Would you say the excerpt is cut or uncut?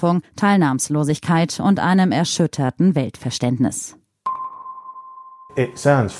uncut